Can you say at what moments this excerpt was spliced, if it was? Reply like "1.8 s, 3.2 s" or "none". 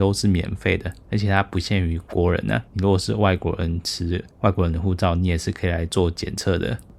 2.7 s, 4.3 s